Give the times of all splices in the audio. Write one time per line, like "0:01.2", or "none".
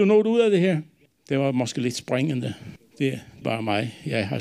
0:03.4